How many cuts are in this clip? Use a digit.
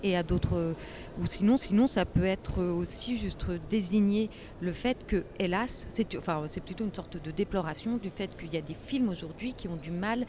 1